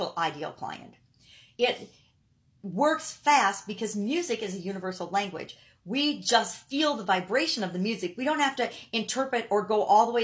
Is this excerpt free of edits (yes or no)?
yes